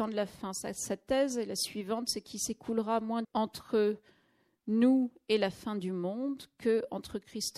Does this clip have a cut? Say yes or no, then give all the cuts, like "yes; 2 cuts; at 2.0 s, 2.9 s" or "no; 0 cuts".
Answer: yes; 1 cut; at 3.2 s